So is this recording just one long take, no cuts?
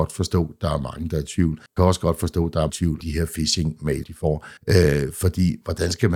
no; 5 cuts; at 1.8 s, 2.7 s, 3.0 s, 4.0 s, 4.6 s

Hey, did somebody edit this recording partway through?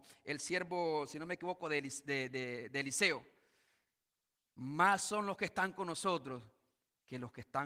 no; 0 cuts

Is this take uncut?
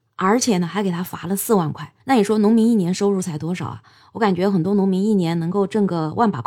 no; 1 cut; at 2.0 s

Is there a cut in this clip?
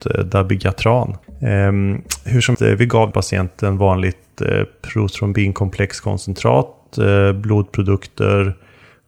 yes; 3 cuts; at 1.2 s, 2.5 s, 3.1 s

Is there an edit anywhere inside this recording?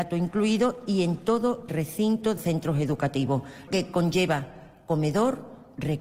yes; 3 cuts; at 1.7 s, 2.4 s, 3.7 s

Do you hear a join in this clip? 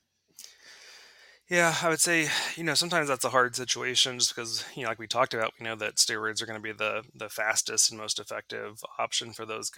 no; 0 cuts

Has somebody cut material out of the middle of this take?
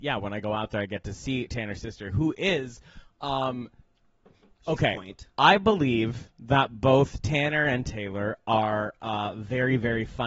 no; 0 cuts

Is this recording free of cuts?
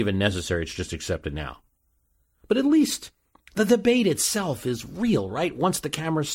yes; 0 cuts

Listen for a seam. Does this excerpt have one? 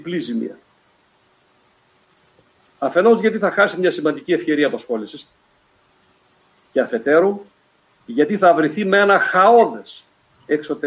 no; 0 cuts

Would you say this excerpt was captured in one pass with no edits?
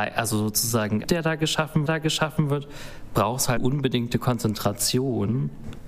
no; 3 cuts; at 1.0 s, 1.9 s, 3.6 s

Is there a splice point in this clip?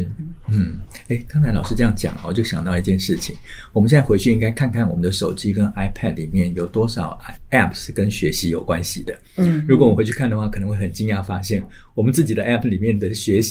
no; 0 cuts

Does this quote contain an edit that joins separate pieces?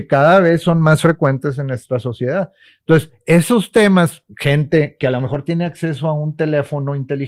no; 0 cuts

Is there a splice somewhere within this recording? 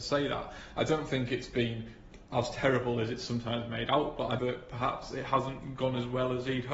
yes; 1 cut; at 4.4 s

